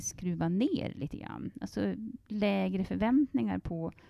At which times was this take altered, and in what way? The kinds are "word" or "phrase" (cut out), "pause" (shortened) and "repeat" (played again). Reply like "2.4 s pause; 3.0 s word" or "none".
none